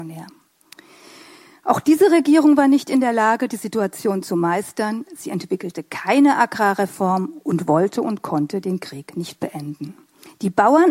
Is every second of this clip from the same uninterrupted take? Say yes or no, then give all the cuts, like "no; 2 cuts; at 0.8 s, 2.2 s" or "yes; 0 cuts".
yes; 0 cuts